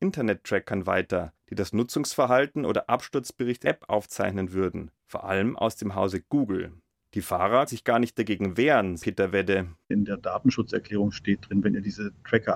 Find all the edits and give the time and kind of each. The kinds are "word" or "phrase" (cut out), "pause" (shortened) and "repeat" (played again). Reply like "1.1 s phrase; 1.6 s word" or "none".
3.6 s word; 7.7 s word; 9.0 s word